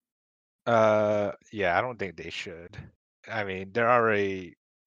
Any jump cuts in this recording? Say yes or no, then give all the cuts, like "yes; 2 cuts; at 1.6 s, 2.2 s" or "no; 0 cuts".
no; 0 cuts